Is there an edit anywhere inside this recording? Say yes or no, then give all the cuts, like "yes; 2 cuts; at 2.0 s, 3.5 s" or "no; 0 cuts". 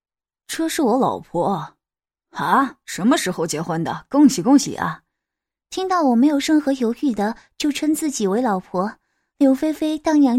no; 0 cuts